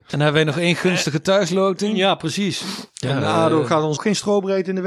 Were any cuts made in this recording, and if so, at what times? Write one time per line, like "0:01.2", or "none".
0:02.9
0:04.0